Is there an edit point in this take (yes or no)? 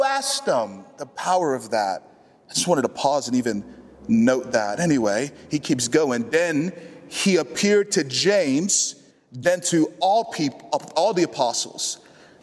yes